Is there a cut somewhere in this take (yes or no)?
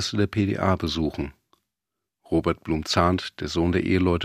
no